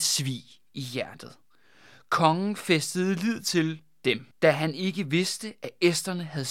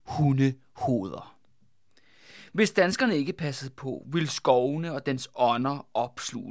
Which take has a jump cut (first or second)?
first